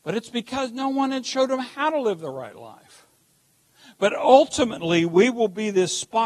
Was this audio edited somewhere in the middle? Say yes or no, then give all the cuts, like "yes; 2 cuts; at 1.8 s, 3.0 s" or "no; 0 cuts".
no; 0 cuts